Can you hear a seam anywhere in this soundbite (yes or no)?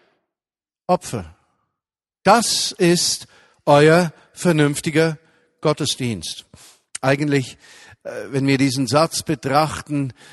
no